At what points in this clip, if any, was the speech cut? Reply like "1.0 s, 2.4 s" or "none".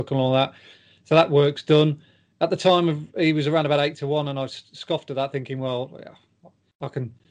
none